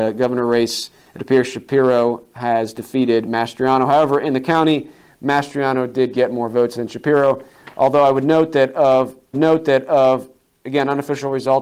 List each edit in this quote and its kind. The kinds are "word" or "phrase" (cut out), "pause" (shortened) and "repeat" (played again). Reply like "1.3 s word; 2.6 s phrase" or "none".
9.3 s repeat